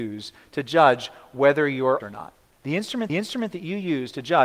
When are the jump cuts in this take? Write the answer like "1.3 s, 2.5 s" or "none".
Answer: 2.0 s, 2.5 s, 3.1 s

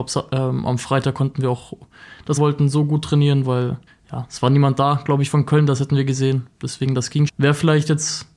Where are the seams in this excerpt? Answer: 2.4 s, 3.9 s, 7.3 s

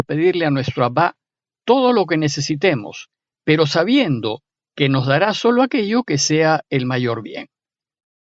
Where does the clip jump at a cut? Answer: none

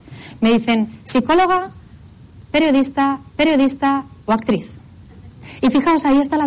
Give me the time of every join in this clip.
3.3 s

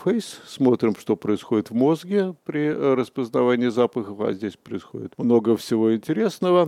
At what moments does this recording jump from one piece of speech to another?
none

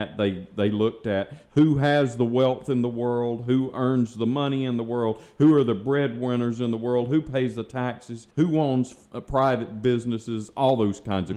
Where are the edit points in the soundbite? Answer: 8.3 s

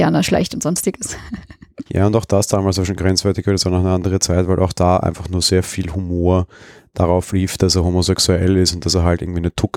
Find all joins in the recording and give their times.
1.9 s

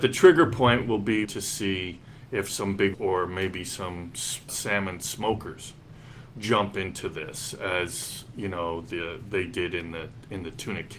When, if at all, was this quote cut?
1.2 s, 2.9 s, 4.5 s, 6.3 s

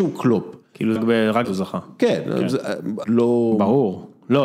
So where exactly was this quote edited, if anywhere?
1.0 s, 1.4 s, 3.0 s

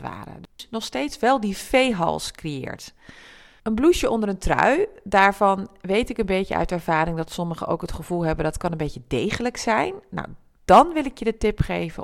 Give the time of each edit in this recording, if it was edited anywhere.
none

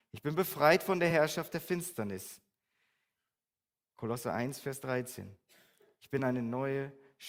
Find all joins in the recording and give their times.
none

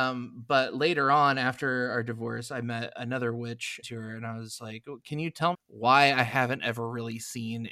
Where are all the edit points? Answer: 3.8 s, 5.5 s

